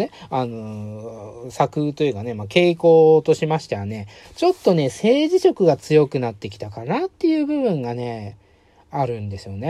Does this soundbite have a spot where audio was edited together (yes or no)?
no